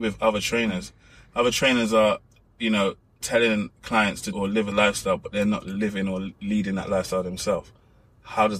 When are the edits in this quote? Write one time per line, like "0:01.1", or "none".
0:04.3
0:04.7